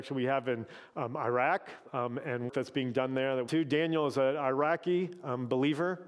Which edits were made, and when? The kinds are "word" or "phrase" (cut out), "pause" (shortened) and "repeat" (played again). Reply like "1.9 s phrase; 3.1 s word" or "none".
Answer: 2.5 s word; 3.5 s phrase